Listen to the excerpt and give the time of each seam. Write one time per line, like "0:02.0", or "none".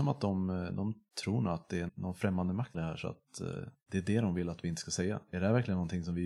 0:01.9
0:02.7